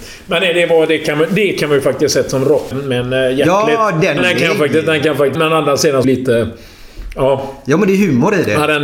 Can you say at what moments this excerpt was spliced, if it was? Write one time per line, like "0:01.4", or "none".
0:02.7
0:04.2
0:05.3
0:06.0